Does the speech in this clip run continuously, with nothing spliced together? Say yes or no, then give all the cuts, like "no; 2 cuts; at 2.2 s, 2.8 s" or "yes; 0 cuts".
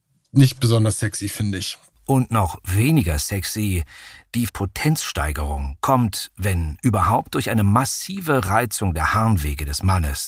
no; 1 cut; at 4.5 s